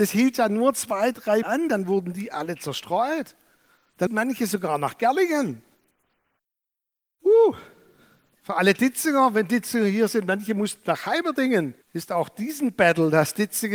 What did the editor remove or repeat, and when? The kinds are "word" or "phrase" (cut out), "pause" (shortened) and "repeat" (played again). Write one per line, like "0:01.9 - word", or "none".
0:01.4 - word
0:04.1 - word
0:11.8 - pause